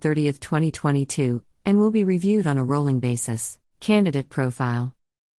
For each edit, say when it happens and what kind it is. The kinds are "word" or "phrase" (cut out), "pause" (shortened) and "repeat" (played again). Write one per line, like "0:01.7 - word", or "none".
0:03.7 - pause